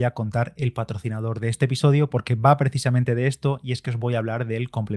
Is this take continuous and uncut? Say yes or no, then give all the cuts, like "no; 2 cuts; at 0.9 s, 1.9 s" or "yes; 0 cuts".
yes; 0 cuts